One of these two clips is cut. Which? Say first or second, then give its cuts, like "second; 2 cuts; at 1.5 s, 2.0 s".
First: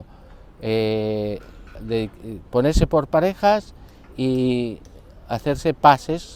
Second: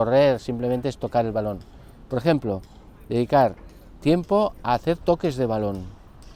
first; 1 cut; at 1.7 s